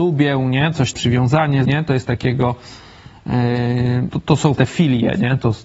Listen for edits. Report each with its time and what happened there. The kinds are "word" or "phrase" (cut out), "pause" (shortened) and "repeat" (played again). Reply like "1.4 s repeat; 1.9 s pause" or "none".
0.9 s word; 1.6 s phrase; 2.0 s word; 4.1 s word; 4.6 s word